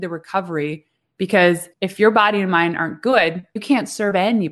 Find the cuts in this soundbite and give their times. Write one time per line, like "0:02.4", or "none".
0:01.7
0:03.6